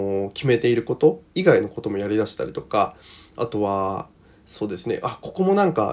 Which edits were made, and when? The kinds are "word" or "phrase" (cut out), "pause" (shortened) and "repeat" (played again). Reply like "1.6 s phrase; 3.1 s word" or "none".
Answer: 1.3 s pause